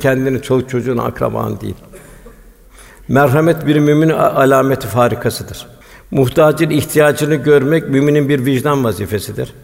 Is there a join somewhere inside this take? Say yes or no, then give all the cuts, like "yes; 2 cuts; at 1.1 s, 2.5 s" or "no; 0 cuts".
yes; 2 cuts; at 2.3 s, 5.8 s